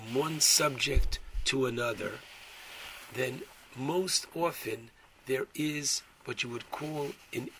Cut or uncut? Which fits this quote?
uncut